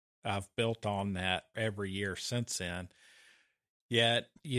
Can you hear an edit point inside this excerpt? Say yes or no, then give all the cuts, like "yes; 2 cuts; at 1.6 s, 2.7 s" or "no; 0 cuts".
yes; 1 cut; at 1.5 s